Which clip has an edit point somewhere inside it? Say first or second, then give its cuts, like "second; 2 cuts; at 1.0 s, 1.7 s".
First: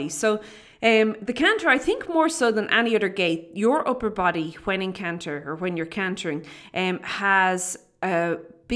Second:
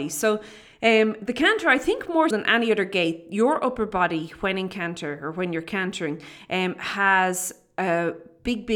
second; 1 cut; at 2.3 s